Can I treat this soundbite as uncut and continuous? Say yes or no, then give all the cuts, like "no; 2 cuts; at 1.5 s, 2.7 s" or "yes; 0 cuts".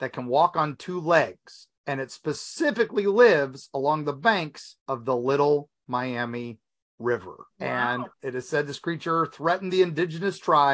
no; 4 cuts; at 1.8 s, 4.8 s, 7.5 s, 8.1 s